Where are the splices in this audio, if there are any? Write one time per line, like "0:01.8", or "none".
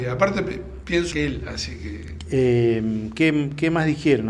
0:01.1